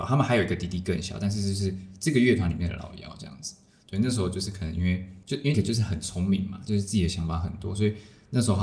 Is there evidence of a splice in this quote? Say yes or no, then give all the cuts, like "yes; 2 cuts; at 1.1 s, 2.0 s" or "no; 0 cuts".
yes; 2 cuts; at 5.2 s, 5.5 s